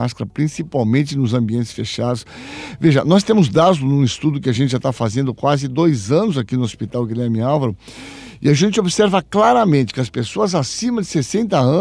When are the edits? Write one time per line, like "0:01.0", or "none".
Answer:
none